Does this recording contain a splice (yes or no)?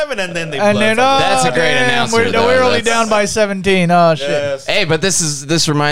no